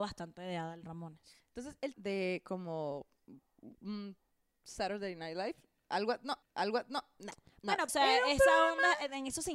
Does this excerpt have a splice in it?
yes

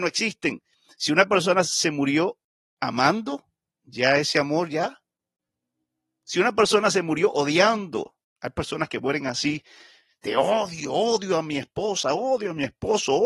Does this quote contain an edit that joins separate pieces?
no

